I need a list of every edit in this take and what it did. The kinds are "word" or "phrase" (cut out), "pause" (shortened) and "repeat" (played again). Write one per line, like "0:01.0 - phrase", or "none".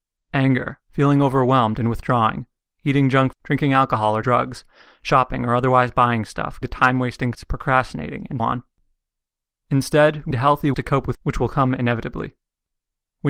0:03.3 - word
0:04.2 - word
0:06.6 - word
0:07.3 - word
0:08.4 - word
0:10.3 - word
0:10.7 - word
0:11.1 - word